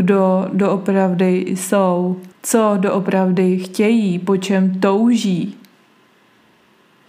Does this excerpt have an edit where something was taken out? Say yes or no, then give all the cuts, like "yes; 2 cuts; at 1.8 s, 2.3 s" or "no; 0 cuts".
yes; 1 cut; at 2.3 s